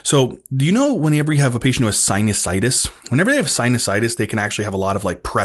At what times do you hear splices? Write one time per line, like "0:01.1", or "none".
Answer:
0:03.0